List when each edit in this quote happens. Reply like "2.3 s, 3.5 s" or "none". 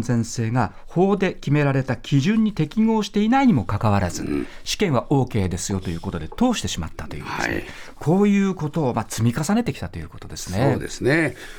none